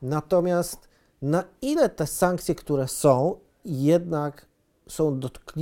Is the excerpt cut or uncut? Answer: uncut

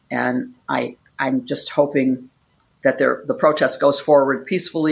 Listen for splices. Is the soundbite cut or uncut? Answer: uncut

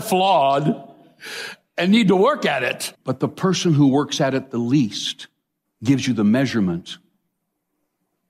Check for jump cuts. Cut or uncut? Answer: cut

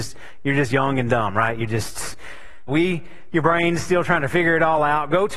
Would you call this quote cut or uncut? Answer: cut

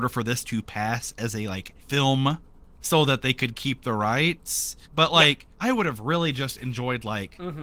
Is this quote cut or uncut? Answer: cut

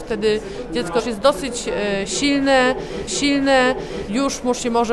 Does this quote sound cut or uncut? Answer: cut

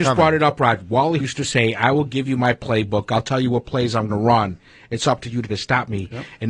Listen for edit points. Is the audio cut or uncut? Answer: cut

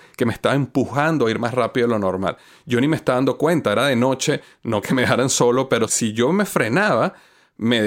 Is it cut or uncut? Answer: cut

